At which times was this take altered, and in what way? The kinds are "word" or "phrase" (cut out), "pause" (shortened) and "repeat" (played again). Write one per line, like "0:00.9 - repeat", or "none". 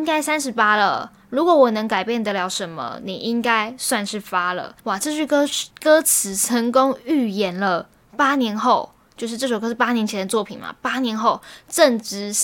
0:04.8 - pause
0:05.7 - pause